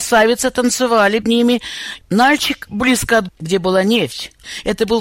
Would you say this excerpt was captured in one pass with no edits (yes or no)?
no